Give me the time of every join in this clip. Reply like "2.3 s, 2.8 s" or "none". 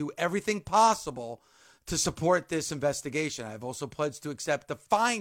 none